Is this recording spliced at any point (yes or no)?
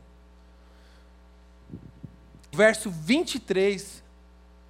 yes